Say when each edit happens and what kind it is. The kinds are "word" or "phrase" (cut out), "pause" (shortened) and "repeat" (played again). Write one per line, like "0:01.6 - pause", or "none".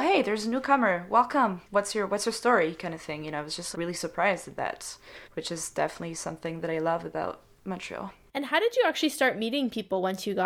0:01.6 - pause
0:03.7 - word
0:05.2 - pause